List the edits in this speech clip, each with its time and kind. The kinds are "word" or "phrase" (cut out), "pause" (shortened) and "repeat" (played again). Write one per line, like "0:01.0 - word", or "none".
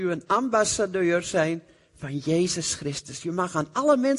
none